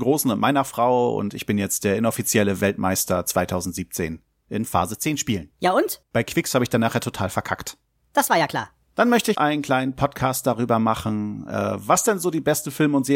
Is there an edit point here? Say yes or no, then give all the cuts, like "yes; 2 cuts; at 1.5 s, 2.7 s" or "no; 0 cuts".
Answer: yes; 2 cuts; at 6.0 s, 9.3 s